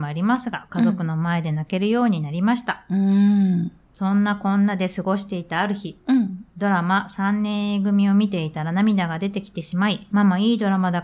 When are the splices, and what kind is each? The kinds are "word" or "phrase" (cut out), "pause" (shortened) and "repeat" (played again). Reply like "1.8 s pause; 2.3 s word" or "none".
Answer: 10.1 s phrase